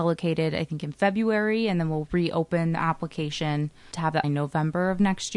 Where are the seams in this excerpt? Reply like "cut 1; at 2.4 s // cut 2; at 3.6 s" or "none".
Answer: cut 1; at 3.9 s // cut 2; at 4.2 s